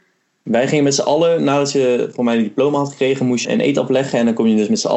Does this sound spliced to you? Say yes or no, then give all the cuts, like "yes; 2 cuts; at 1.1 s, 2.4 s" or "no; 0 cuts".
yes; 1 cut; at 3.4 s